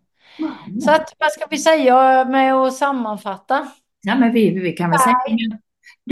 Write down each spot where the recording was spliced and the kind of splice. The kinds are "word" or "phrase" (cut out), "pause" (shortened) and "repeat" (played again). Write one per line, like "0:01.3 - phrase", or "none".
none